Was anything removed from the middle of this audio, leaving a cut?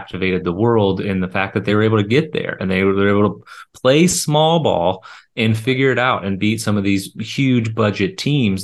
no; 0 cuts

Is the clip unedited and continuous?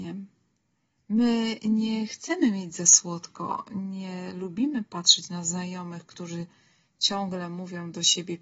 yes; 0 cuts

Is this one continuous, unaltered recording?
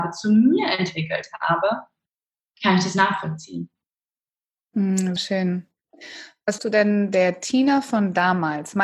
no; 2 cuts; at 5.2 s, 6.6 s

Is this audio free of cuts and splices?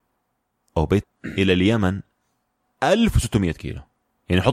no; 1 cut; at 1.0 s

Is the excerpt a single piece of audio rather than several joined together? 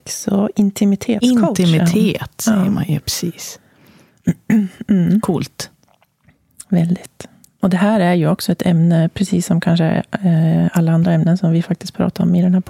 yes; 0 cuts

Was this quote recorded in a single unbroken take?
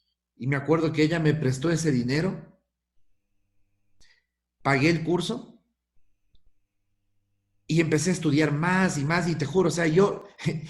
yes; 0 cuts

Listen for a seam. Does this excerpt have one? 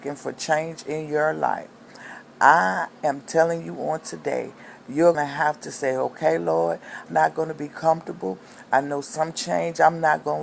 yes; 2 cuts; at 5.1 s, 7.1 s

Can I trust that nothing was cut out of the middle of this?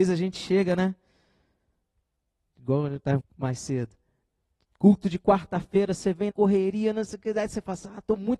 no; 2 cuts; at 3.2 s, 6.3 s

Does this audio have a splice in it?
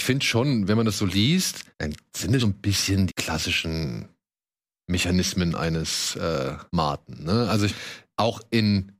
yes; 5 cuts; at 1.7 s, 2.4 s, 3.1 s, 6.7 s, 7.7 s

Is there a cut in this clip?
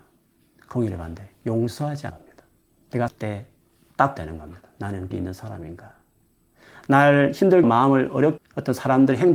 yes; 6 cuts; at 2.1 s, 3.1 s, 4.2 s, 5.1 s, 7.6 s, 8.4 s

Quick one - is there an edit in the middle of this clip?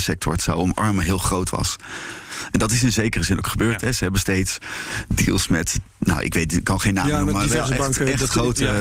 no; 0 cuts

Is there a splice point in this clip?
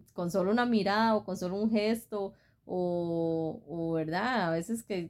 no; 0 cuts

